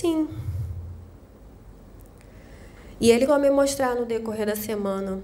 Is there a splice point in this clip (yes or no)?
yes